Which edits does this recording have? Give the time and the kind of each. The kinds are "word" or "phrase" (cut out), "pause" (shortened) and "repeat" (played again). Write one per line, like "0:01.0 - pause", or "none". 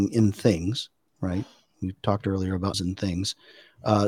0:02.7 - word